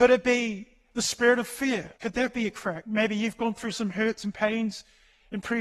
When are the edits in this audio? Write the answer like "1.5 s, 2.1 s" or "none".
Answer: 2.0 s